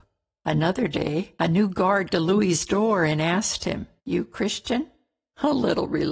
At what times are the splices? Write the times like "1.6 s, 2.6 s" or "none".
1.4 s, 2.1 s, 4.0 s